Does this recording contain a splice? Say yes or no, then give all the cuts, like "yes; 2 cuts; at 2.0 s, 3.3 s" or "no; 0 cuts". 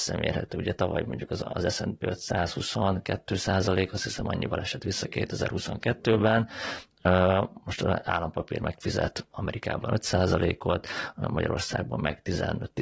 no; 0 cuts